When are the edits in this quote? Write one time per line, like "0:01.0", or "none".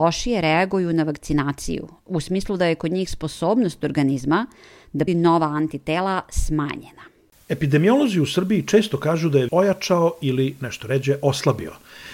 0:05.1
0:09.5